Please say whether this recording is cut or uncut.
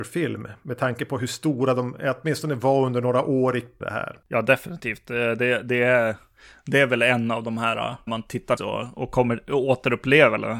cut